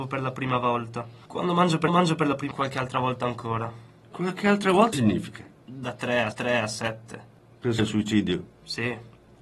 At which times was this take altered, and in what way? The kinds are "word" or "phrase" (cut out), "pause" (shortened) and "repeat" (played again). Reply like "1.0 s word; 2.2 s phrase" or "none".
1.3 s pause; 1.9 s repeat; 2.5 s phrase; 4.9 s word; 6.3 s repeat; 7.8 s word